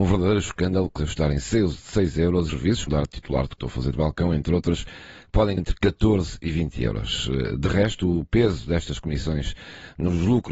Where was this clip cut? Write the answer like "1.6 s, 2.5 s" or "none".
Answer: 1.0 s, 2.5 s, 2.9 s, 3.6 s, 3.9 s, 5.6 s